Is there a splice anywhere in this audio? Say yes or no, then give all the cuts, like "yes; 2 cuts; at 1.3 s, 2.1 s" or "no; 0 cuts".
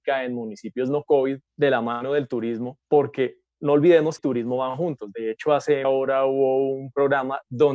yes; 4 cuts; at 1.5 s, 2.8 s, 4.2 s, 5.8 s